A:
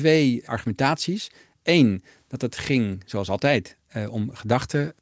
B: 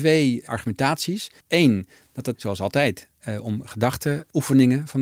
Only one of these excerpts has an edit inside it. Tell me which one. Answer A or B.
B